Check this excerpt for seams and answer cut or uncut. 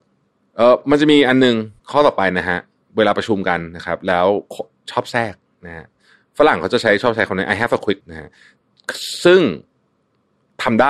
cut